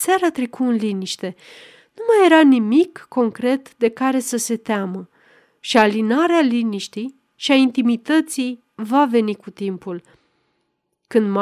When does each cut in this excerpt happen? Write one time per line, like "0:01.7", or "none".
0:08.7